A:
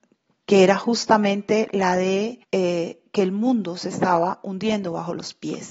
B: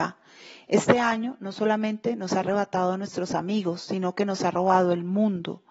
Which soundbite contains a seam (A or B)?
A